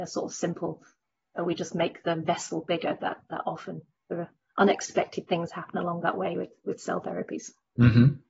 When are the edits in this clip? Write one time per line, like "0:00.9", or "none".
none